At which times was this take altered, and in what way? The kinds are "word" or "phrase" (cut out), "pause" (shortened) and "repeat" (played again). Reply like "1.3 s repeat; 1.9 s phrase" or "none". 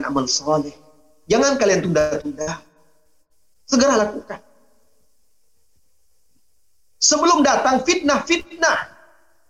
none